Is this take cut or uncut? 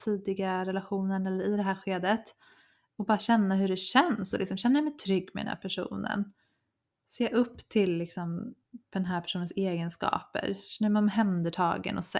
uncut